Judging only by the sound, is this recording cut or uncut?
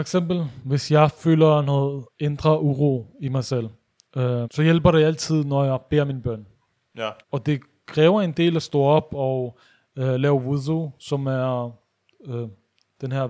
cut